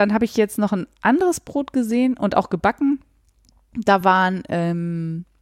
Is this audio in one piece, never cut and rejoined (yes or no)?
yes